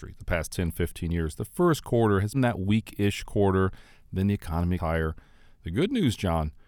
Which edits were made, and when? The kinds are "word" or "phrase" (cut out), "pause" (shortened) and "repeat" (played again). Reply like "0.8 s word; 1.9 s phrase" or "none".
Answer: 2.3 s word; 4.8 s word